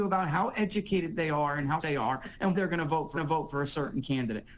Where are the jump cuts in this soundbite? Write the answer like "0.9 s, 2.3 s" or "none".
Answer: 1.8 s, 2.5 s, 3.2 s